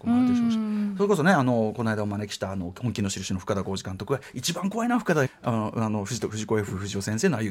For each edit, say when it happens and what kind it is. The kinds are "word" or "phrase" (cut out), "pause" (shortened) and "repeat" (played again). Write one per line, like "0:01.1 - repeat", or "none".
0:05.3 - word